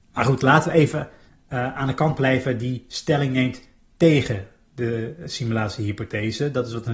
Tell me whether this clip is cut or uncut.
uncut